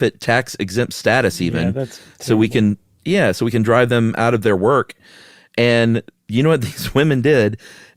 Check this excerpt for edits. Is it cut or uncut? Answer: uncut